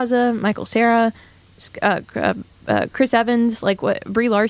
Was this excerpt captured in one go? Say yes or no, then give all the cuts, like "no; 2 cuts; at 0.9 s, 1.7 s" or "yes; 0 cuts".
yes; 0 cuts